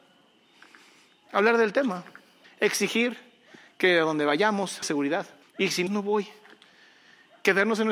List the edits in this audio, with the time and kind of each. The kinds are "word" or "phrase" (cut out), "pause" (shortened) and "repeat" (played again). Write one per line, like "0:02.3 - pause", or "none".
0:02.4 - pause
0:04.8 - word
0:05.4 - pause
0:05.9 - phrase